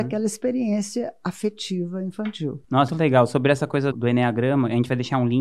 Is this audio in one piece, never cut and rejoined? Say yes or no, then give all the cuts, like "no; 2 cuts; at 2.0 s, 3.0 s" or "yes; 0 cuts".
no; 2 cuts; at 2.9 s, 3.9 s